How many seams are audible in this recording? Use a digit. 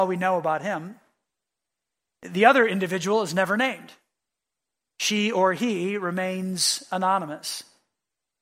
0